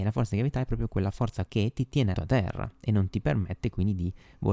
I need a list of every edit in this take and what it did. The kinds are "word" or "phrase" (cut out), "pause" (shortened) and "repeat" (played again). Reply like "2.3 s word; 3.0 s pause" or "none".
1.5 s word; 2.1 s word